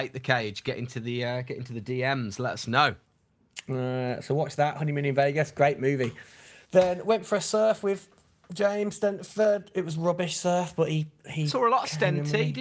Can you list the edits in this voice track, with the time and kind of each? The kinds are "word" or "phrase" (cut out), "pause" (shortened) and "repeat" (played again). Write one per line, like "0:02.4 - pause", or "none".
0:06.6 - pause